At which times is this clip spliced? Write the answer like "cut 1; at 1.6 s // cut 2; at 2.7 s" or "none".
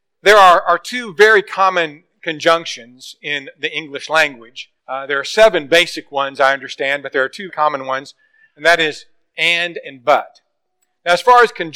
cut 1; at 4.8 s // cut 2; at 7.5 s